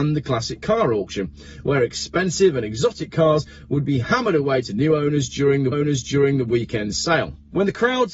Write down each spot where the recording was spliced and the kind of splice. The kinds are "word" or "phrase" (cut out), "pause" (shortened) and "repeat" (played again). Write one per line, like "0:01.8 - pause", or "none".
0:05.7 - repeat